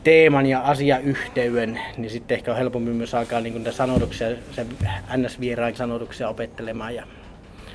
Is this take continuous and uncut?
no; 1 cut; at 5.8 s

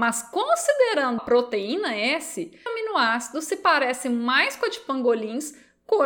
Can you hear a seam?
yes; 2 cuts; at 1.2 s, 2.7 s

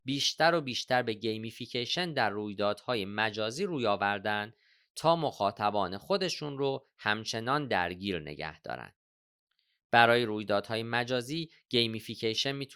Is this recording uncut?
yes; 0 cuts

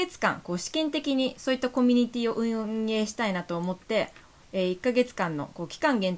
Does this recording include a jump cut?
no; 0 cuts

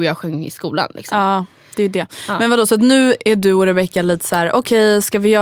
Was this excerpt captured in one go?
yes; 0 cuts

